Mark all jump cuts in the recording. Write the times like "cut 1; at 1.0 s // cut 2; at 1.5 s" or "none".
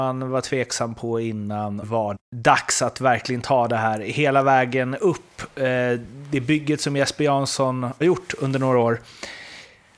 cut 1; at 1.8 s // cut 2; at 2.2 s // cut 3; at 8.0 s